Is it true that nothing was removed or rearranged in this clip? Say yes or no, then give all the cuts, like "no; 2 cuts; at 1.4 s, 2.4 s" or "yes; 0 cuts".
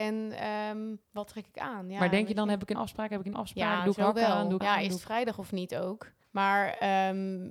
no; 5 cuts; at 1.0 s, 2.8 s, 3.3 s, 4.6 s, 6.2 s